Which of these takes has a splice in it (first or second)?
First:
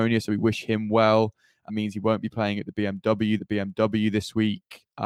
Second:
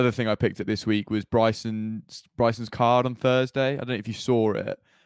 first